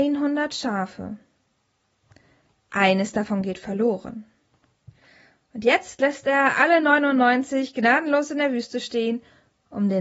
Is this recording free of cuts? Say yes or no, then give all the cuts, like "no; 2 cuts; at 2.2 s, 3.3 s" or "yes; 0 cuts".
yes; 0 cuts